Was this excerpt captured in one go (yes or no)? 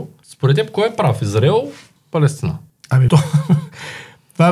no